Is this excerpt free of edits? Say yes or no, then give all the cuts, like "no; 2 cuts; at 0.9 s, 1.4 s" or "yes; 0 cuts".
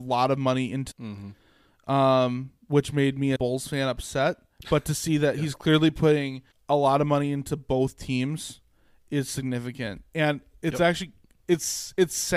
no; 3 cuts; at 0.9 s, 3.4 s, 6.5 s